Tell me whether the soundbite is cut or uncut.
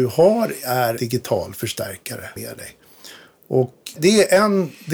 cut